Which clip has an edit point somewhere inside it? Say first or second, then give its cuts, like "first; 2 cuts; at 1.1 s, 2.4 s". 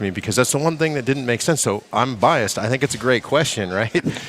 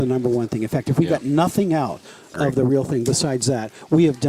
second; 1 cut; at 2.3 s